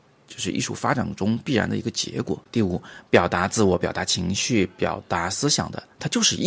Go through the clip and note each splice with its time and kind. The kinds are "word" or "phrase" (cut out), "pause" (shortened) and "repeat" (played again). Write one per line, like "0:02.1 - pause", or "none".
0:02.5 - pause